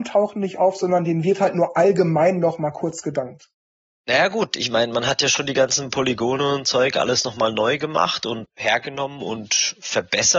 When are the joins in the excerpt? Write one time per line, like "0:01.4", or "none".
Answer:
none